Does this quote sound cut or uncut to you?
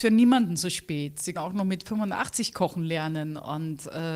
cut